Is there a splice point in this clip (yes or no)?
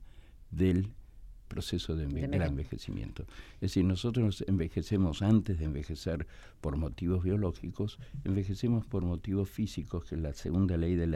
yes